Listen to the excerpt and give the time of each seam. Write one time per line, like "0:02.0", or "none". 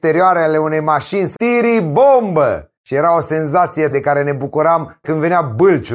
0:01.3
0:02.8
0:03.9
0:05.0